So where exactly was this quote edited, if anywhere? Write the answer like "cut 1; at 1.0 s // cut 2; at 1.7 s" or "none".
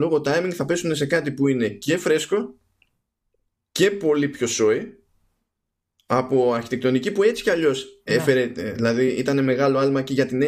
none